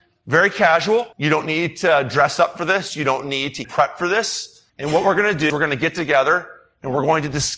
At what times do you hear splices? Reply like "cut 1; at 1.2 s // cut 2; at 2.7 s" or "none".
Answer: cut 1; at 1.1 s // cut 2; at 3.6 s // cut 3; at 4.7 s // cut 4; at 5.5 s